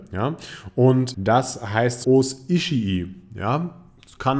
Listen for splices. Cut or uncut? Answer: cut